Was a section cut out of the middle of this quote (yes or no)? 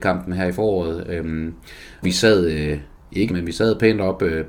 yes